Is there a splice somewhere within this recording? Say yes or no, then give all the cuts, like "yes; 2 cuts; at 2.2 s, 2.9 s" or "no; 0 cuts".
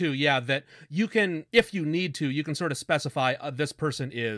yes; 1 cut; at 1.5 s